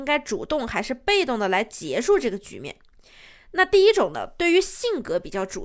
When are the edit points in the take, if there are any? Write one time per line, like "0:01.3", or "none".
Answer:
none